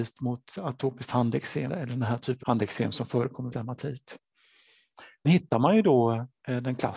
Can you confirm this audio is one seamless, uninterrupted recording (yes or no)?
no